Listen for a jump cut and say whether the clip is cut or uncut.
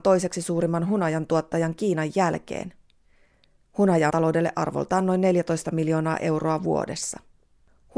cut